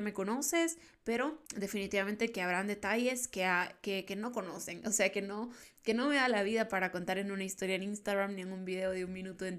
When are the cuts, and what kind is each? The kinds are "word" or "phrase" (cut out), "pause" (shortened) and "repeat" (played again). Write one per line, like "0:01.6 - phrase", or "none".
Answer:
0:01.5 - pause